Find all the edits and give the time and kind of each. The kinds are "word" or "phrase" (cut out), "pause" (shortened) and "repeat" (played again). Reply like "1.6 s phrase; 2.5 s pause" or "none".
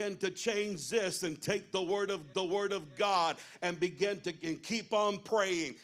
2.3 s repeat